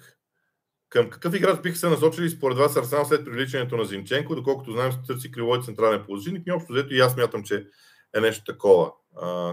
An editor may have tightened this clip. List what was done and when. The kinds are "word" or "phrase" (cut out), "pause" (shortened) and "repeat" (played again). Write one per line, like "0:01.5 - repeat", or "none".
none